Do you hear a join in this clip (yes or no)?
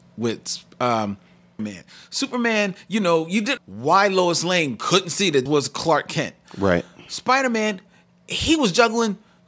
yes